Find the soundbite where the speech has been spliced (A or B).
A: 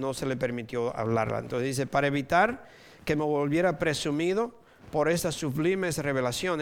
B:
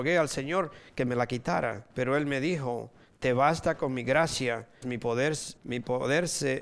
B